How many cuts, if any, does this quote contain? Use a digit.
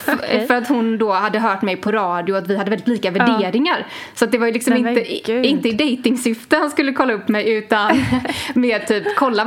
0